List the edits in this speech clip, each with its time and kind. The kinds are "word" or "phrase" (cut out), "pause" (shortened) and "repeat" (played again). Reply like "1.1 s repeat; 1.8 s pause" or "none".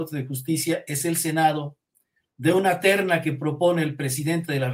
none